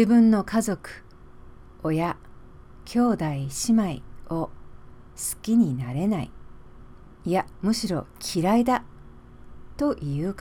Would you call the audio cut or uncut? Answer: cut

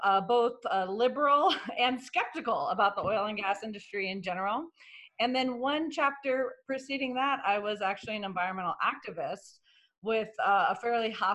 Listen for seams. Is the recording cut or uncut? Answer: uncut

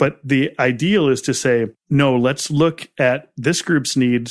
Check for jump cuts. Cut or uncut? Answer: uncut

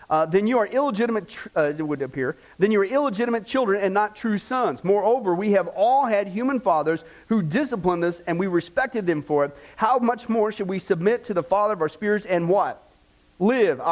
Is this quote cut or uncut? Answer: uncut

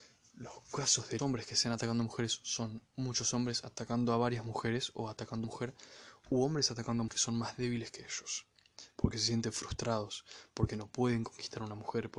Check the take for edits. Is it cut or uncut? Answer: cut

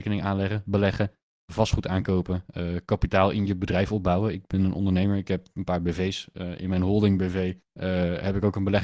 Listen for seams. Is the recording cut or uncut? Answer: uncut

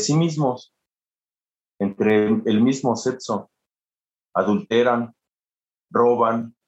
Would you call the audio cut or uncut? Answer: uncut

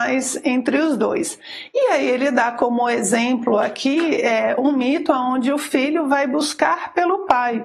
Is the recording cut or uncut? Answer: uncut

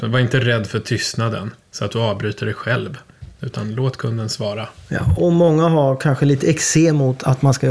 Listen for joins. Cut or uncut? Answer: cut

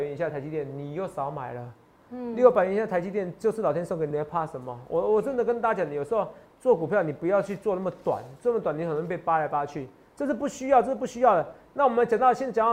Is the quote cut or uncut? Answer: cut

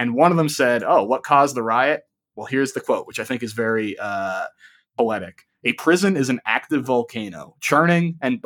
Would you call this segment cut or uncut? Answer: uncut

